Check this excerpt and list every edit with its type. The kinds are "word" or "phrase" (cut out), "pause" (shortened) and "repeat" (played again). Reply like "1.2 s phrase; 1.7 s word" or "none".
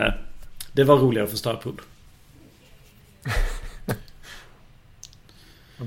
none